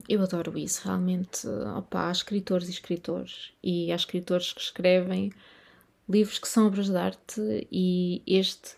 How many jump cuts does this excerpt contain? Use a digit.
0